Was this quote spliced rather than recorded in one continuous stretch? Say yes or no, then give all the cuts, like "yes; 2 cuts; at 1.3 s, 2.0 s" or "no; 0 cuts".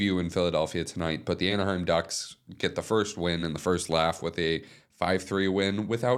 no; 0 cuts